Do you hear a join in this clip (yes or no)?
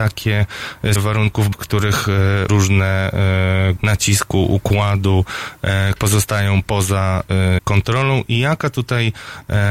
yes